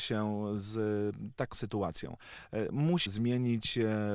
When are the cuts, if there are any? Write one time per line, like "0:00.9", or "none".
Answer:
0:01.5
0:03.1